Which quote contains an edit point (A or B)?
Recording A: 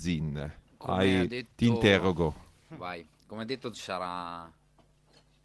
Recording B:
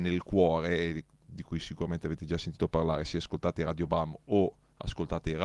A